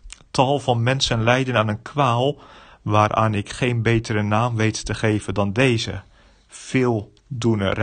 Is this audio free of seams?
yes; 0 cuts

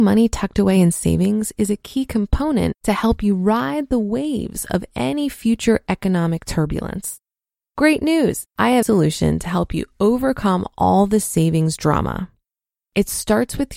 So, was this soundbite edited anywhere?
yes; 3 cuts; at 2.8 s, 8.5 s, 8.8 s

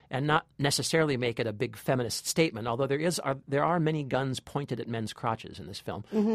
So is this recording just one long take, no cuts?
yes; 0 cuts

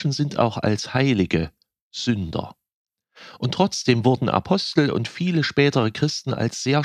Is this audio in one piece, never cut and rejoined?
yes; 0 cuts

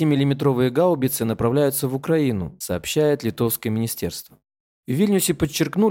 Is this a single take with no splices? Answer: yes; 0 cuts

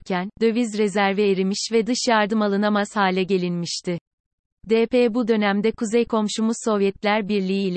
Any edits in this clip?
no; 0 cuts

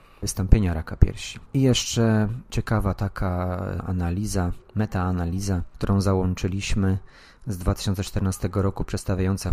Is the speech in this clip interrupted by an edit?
no; 0 cuts

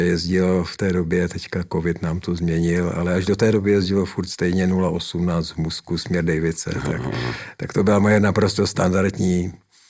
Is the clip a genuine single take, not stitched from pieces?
yes; 0 cuts

